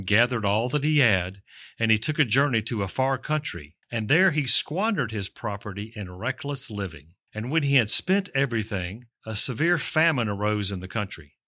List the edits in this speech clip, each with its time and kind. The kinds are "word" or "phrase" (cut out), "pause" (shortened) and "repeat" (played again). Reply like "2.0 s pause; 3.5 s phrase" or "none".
3.8 s pause; 7.2 s pause